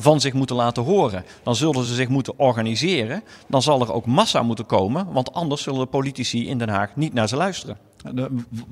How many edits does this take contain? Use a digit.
0